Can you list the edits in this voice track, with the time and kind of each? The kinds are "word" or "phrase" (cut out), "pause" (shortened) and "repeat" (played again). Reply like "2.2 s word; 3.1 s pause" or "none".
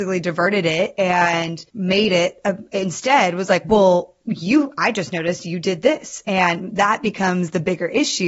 1.7 s pause